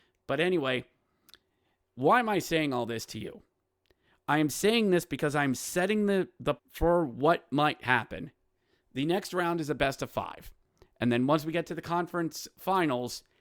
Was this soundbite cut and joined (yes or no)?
yes